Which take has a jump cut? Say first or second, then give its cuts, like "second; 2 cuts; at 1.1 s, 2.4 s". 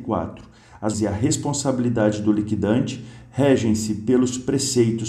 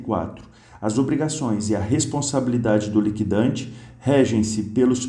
first; 1 cut; at 0.9 s